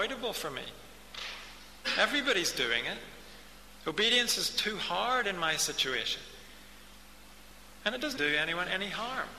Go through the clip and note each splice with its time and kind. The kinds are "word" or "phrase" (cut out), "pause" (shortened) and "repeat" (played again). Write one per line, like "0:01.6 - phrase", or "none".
0:08.2 - word